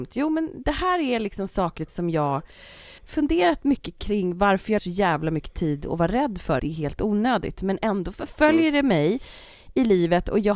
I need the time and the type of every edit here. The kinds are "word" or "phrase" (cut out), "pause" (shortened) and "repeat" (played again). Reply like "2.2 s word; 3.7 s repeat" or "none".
1.9 s word; 3.0 s pause; 4.8 s word; 6.6 s phrase